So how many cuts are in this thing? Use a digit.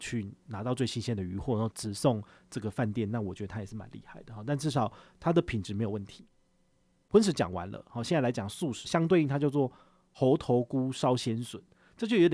1